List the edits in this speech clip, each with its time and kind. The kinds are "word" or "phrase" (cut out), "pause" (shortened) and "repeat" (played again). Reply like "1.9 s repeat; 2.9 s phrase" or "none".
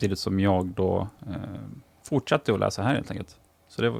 none